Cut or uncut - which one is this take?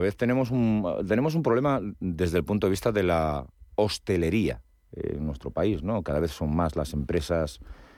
uncut